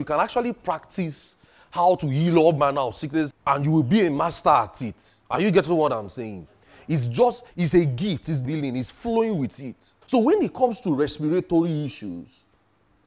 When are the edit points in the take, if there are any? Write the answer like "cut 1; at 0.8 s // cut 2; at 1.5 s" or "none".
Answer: cut 1; at 3.3 s // cut 2; at 5.2 s // cut 3; at 7.5 s // cut 4; at 8.4 s // cut 5; at 10.0 s